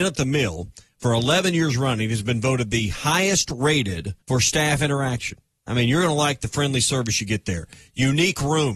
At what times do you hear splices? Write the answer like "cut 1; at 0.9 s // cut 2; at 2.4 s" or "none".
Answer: cut 1; at 4.2 s